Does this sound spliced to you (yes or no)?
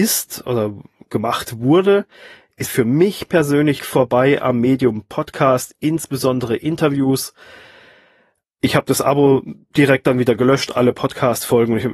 yes